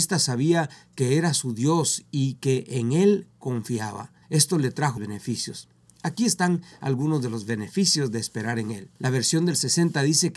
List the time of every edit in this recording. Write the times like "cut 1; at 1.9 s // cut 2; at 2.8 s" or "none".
cut 1; at 4.2 s // cut 2; at 5.0 s // cut 3; at 9.0 s